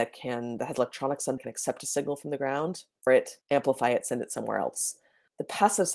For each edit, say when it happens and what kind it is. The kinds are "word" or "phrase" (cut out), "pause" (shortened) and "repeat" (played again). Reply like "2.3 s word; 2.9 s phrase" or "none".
1.4 s phrase; 3.1 s word; 3.4 s pause